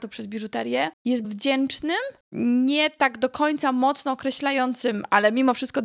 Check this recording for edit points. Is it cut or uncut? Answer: cut